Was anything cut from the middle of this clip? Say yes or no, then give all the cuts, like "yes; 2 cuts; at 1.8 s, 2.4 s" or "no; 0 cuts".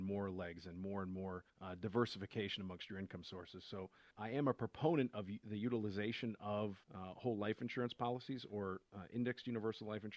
yes; 3 cuts; at 1.5 s, 4.1 s, 6.8 s